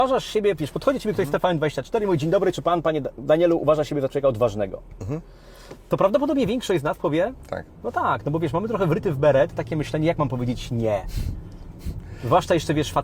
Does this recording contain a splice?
no; 0 cuts

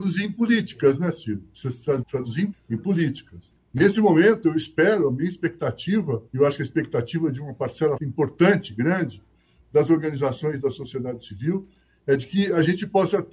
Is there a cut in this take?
yes; 5 cuts; at 2.0 s, 2.5 s, 3.6 s, 6.3 s, 8.0 s

